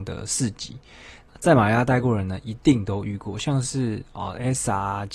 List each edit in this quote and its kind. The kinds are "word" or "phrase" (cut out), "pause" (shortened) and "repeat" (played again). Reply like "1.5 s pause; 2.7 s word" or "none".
none